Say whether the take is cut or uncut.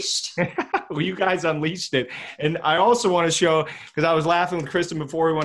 uncut